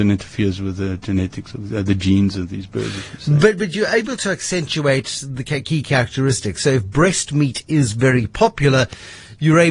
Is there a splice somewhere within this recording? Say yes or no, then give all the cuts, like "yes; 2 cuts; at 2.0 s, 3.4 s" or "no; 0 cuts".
no; 0 cuts